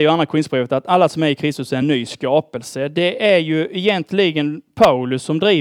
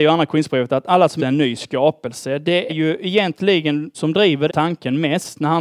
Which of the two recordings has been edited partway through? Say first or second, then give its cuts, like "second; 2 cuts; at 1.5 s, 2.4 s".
second; 4 cuts; at 1.2 s, 2.7 s, 3.9 s, 4.5 s